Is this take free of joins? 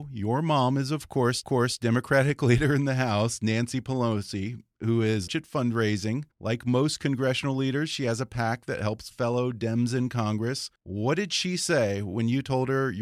no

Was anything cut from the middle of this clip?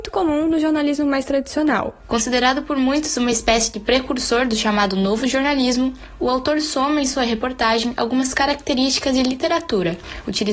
no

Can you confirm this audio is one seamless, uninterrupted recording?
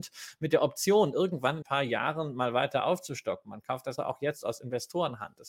no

